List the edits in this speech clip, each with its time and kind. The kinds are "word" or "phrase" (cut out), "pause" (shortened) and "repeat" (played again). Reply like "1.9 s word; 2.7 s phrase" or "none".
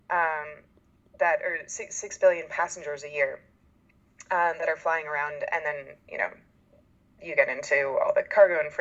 none